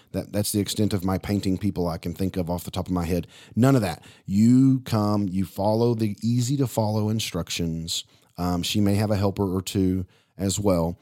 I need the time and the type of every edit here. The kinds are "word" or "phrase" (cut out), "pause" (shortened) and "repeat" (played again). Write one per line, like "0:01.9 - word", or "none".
none